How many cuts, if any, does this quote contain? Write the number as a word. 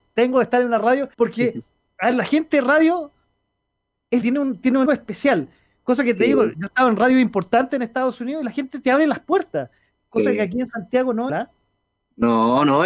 four